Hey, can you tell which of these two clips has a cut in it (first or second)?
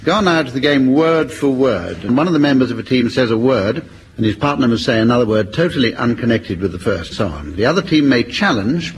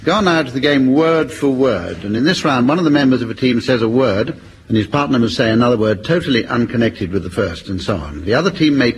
first